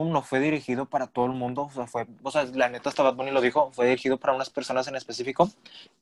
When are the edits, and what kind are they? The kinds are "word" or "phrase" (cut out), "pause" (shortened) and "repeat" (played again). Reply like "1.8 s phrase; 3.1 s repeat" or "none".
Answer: none